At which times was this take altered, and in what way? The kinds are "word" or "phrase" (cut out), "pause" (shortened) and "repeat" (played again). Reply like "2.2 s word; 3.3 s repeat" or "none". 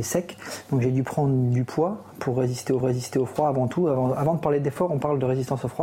2.8 s repeat